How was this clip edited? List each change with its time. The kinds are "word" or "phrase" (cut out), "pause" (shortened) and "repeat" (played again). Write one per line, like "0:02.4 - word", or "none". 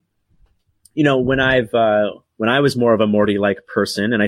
none